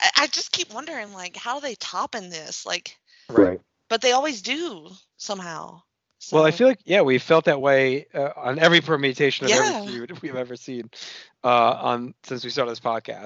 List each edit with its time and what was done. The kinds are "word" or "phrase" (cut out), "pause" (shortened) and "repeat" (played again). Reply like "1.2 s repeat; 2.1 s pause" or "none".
none